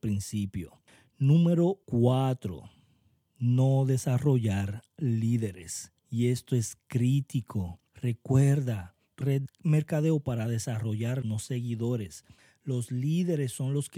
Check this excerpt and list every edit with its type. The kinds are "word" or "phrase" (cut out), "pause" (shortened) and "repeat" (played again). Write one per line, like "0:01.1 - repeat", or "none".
0:01.8 - pause
0:06.0 - pause
0:07.9 - pause
0:09.2 - phrase
0:11.2 - word